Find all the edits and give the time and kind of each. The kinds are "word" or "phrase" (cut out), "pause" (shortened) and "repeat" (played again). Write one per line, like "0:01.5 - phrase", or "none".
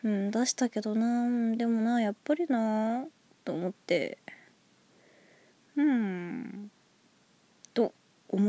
none